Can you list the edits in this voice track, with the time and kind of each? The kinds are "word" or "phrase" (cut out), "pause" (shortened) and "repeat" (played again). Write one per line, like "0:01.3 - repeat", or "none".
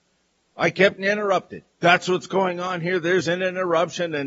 0:01.0 - word
0:01.7 - pause

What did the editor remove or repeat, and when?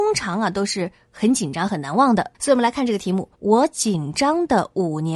0:02.3 - pause
0:03.3 - pause

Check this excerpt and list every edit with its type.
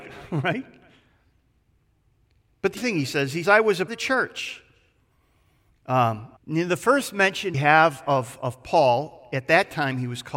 0:02.8 - word
0:03.4 - word
0:03.9 - phrase
0:06.4 - pause
0:07.5 - word

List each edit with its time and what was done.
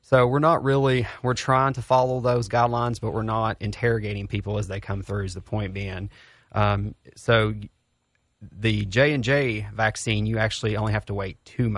none

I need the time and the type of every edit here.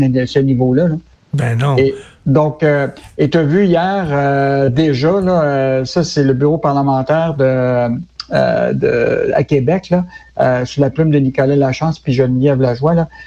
none

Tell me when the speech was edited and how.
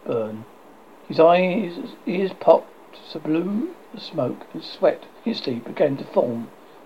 0:00.9 - pause
0:03.1 - word
0:03.9 - word
0:05.2 - pause

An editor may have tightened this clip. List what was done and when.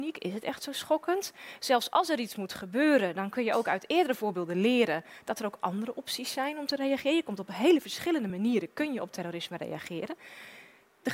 none

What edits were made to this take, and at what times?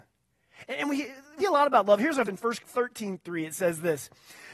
0:01.4 - word
0:02.3 - word
0:02.6 - word

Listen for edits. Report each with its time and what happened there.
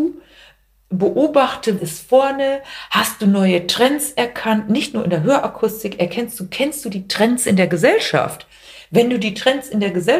0:01.8 - word

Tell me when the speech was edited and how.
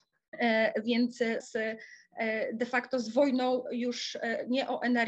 0:01.4 - phrase

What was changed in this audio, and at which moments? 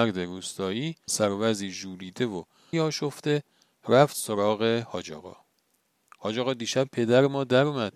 0:01.1 - word
0:02.7 - word

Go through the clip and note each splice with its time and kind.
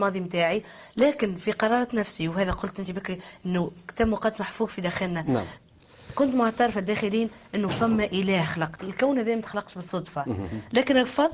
none

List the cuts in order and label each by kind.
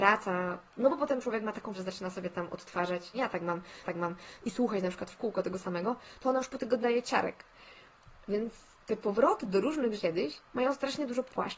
0:01.7 - word
0:03.1 - word
0:03.8 - repeat
0:06.8 - word
0:08.8 - pause
0:10.0 - phrase
0:10.5 - pause

